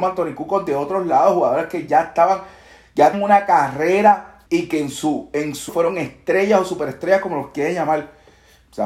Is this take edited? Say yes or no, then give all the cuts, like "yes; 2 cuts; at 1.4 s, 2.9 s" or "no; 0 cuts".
yes; 3 cuts; at 3.1 s, 4.5 s, 5.7 s